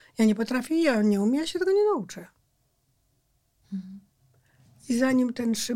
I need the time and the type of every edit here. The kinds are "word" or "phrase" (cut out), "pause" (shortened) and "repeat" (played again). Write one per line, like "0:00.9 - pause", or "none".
none